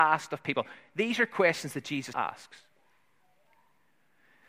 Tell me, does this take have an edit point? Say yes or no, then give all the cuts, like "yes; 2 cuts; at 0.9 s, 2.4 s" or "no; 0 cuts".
yes; 1 cut; at 2.1 s